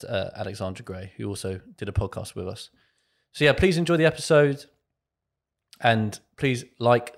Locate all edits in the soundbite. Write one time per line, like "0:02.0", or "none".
none